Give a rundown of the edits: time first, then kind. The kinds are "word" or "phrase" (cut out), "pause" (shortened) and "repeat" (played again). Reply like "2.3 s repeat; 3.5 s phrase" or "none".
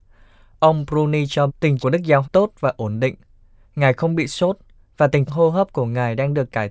1.5 s word; 1.8 s word; 2.2 s word; 5.3 s word